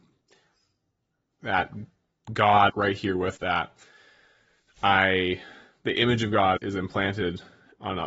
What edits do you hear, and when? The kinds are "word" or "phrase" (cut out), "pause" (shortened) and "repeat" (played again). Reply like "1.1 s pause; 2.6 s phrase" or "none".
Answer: 2.7 s word; 3.4 s word; 6.6 s word